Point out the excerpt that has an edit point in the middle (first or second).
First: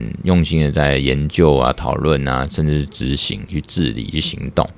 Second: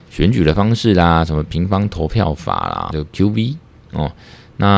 second